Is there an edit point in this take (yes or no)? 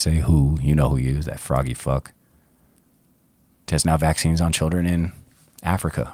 no